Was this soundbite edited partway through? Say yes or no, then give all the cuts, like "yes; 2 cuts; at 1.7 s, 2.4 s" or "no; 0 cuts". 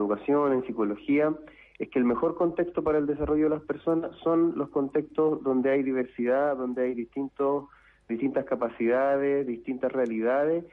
no; 0 cuts